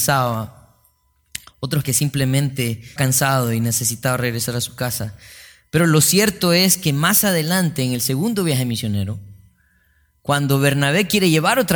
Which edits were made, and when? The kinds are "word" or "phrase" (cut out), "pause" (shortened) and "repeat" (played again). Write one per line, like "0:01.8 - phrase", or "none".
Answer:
0:01.8 - word
0:03.0 - word